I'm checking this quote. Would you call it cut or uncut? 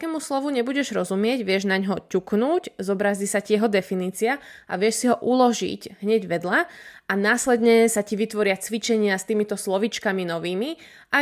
uncut